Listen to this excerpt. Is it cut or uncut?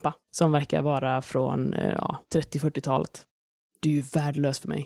uncut